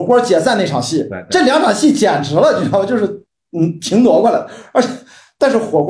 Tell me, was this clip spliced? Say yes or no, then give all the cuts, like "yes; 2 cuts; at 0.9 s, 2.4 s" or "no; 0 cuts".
no; 0 cuts